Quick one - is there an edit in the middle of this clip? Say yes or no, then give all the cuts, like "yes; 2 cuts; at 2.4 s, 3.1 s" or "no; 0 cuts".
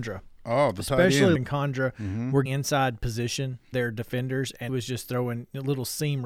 yes; 4 cuts; at 1.4 s, 2.5 s, 3.7 s, 4.7 s